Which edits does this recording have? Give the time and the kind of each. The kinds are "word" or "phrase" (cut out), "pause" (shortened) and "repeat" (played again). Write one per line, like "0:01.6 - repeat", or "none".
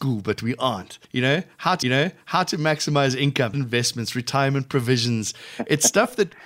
0:01.0 - pause
0:01.8 - repeat
0:03.5 - phrase